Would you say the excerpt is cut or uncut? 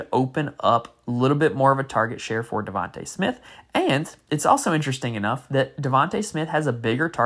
uncut